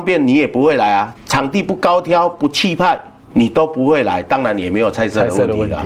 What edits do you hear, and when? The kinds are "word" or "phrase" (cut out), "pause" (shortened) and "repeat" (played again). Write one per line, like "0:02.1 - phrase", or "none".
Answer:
0:01.1 - word
0:03.2 - pause